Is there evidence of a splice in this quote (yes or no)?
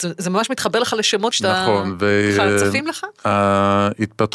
yes